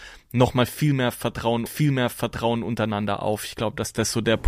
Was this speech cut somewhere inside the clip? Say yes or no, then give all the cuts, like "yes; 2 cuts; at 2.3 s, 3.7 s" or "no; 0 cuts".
yes; 1 cut; at 1.7 s